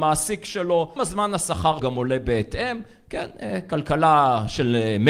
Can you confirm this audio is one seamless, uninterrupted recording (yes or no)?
no